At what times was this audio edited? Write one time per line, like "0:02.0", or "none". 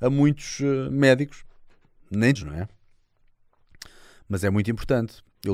0:02.4